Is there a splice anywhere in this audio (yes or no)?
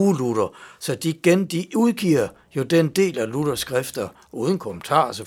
no